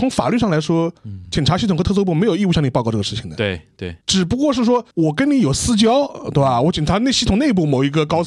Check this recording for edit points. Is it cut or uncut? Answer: cut